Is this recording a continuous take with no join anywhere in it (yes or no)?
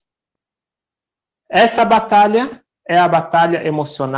yes